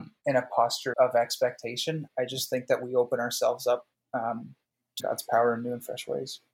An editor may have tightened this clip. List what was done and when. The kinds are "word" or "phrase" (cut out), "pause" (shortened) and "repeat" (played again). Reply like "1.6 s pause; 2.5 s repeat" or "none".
0.9 s word; 2.1 s word; 5.0 s word